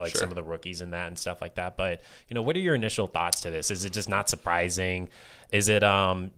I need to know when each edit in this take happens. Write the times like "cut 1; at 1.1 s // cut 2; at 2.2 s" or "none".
none